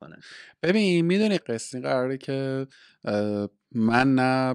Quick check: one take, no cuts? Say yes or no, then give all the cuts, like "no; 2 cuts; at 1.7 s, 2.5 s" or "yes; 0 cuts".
no; 2 cuts; at 1.4 s, 1.7 s